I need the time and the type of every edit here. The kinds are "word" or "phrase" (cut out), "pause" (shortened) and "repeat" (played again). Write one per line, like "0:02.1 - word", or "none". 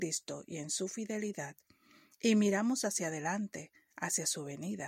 none